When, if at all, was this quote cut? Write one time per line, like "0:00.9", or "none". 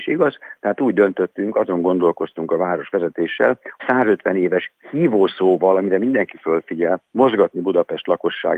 0:03.8
0:04.8